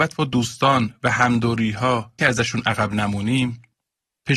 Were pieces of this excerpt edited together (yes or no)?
yes